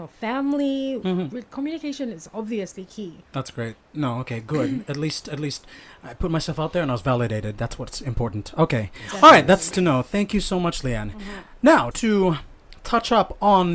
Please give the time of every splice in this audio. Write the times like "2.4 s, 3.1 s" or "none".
3.3 s, 9.7 s, 11.9 s